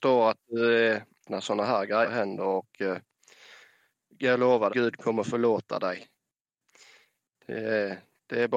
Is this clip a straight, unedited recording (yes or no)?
no